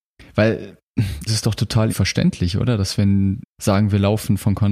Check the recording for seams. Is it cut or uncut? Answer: cut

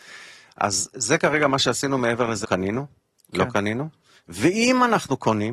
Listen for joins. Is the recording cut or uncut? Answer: cut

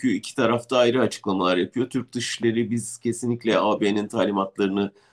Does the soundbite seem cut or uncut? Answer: uncut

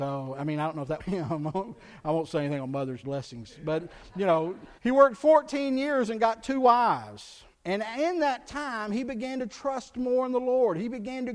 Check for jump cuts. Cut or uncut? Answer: cut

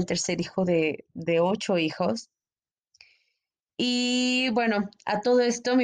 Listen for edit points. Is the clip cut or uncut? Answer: uncut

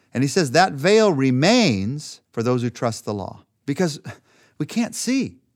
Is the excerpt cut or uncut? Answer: cut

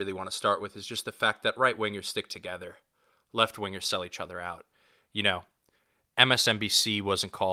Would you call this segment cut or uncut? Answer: uncut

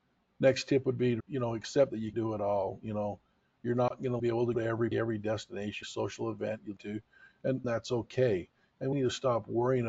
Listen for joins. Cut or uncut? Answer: cut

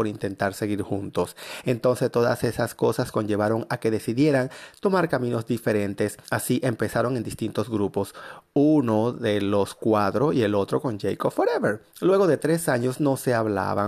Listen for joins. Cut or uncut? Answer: cut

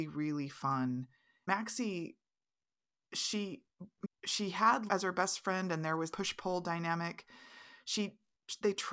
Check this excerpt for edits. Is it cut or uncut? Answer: cut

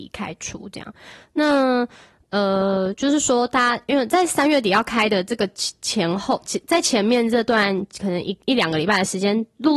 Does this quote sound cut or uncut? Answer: uncut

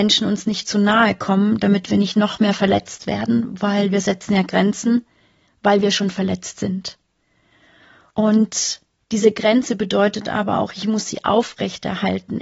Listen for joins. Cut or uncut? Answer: uncut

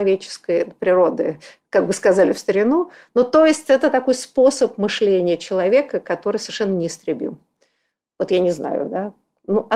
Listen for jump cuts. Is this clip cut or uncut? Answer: uncut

